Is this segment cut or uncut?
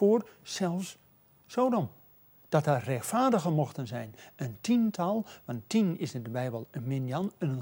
uncut